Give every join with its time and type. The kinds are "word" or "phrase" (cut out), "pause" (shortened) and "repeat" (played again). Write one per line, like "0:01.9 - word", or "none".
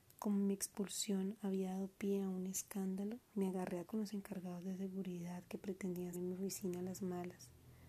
0:03.2 - pause
0:03.9 - word
0:06.1 - word